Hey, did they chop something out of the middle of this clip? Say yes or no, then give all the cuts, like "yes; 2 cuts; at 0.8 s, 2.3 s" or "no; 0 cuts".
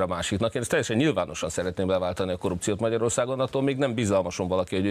no; 0 cuts